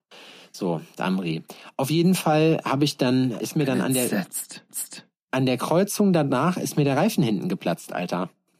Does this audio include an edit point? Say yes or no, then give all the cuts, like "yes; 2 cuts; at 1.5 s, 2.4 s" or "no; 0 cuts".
yes; 3 cuts; at 1.0 s, 3.4 s, 4.7 s